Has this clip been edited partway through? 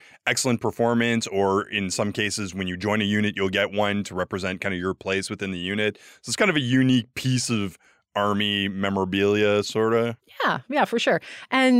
no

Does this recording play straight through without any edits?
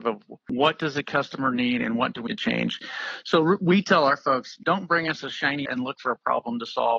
no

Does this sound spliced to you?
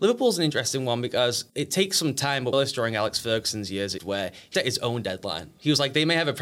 yes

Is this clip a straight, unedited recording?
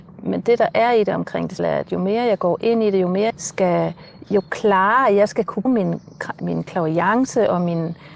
no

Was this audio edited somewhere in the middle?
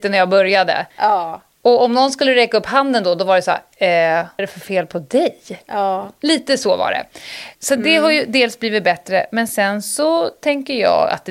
yes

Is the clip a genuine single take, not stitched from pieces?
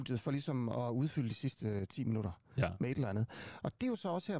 yes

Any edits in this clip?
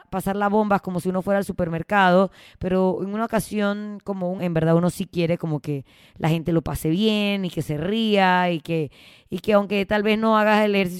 yes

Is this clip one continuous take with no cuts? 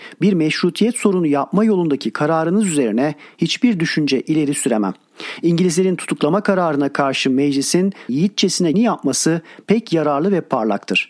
no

